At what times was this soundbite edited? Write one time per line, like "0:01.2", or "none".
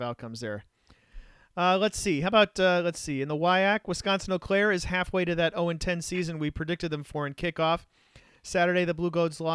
none